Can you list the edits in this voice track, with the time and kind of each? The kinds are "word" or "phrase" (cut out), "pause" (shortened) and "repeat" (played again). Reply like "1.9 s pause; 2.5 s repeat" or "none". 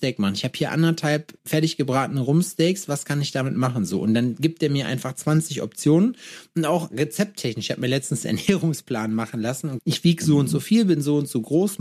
1.4 s pause; 9.8 s phrase